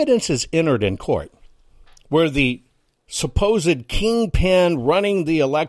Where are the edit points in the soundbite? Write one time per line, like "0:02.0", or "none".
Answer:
none

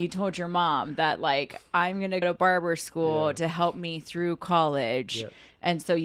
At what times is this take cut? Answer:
0:02.2

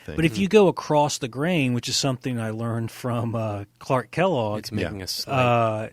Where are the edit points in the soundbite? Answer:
none

